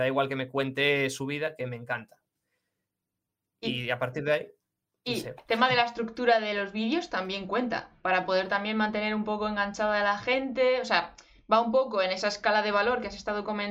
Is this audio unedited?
yes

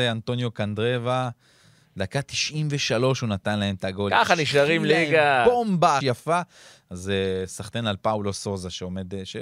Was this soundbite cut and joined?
yes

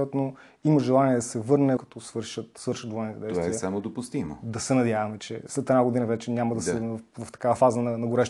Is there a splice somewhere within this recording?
yes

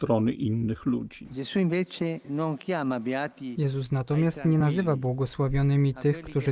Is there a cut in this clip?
no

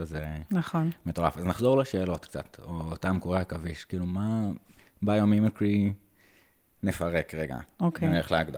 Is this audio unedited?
yes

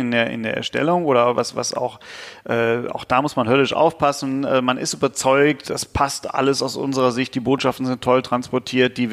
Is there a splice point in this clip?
yes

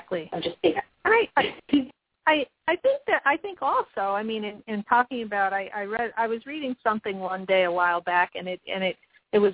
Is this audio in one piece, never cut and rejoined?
yes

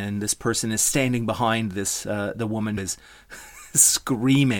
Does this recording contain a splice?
yes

